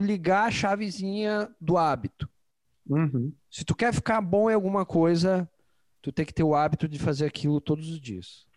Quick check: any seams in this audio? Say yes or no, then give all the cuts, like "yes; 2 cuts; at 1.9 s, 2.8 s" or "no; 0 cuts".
no; 0 cuts